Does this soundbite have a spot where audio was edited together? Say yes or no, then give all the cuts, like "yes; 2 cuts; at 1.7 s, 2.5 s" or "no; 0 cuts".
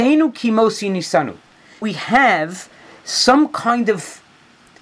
yes; 1 cut; at 1.8 s